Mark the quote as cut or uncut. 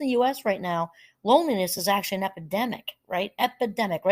uncut